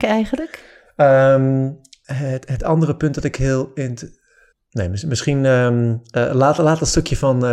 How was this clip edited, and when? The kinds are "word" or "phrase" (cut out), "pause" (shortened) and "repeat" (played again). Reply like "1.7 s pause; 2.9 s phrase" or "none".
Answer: 4.5 s pause